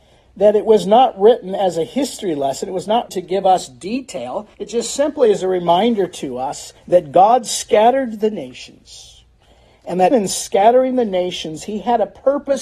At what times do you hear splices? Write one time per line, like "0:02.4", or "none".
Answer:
0:03.1
0:04.5
0:06.8
0:10.1

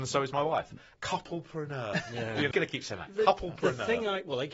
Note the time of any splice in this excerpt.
0:02.5

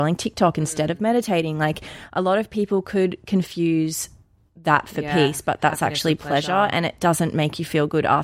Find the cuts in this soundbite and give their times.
none

